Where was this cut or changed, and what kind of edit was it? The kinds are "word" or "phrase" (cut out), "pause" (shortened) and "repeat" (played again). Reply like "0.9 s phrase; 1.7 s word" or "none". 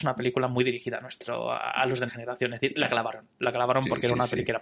2.1 s word

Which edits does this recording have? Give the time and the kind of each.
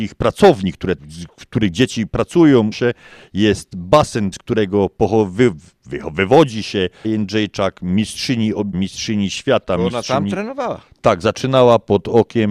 1.0 s word; 2.7 s word; 4.3 s word; 7.0 s word; 8.7 s word

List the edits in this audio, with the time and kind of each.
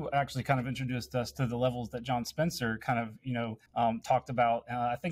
3.7 s pause

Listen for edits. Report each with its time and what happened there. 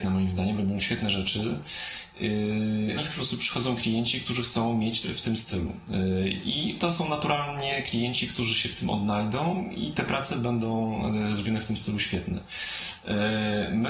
3.0 s word; 5.0 s word

